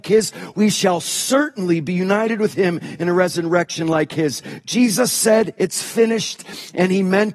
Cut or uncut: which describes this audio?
uncut